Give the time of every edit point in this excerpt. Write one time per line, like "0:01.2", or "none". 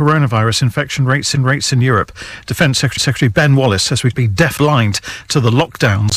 0:01.3
0:03.0
0:04.1
0:04.6